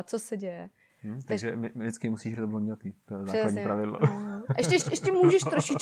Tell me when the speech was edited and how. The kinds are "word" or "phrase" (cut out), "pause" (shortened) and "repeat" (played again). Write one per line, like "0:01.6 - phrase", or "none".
0:02.3 - word